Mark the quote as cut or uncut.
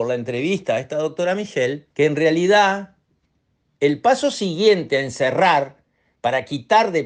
cut